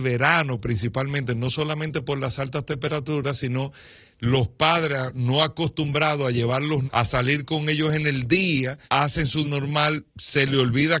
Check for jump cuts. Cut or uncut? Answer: cut